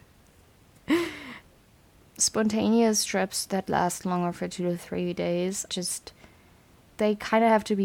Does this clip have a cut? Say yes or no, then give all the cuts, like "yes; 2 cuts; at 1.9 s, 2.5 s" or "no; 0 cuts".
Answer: yes; 1 cut; at 5.7 s